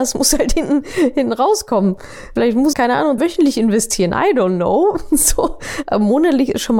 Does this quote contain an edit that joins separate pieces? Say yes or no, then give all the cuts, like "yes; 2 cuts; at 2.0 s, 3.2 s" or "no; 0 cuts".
yes; 2 cuts; at 2.7 s, 3.2 s